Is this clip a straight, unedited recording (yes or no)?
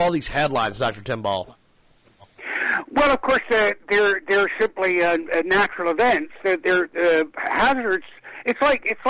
yes